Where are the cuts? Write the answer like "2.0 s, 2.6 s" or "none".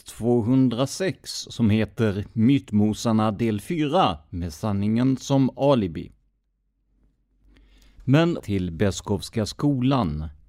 8.4 s